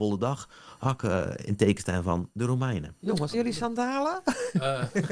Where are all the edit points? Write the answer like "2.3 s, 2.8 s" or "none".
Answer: 3.3 s